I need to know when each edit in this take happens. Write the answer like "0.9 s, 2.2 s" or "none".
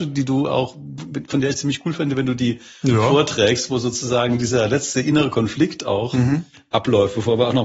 none